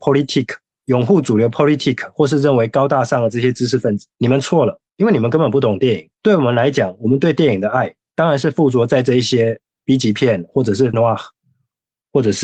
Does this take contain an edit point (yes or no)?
yes